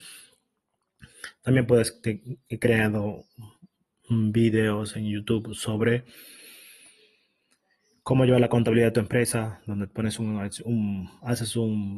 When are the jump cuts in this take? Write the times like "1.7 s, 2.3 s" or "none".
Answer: none